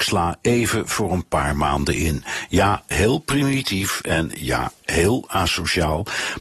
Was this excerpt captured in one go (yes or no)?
yes